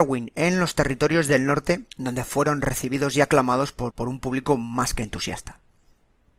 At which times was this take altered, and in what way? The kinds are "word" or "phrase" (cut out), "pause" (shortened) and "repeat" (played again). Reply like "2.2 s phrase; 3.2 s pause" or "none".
1.9 s pause; 3.9 s word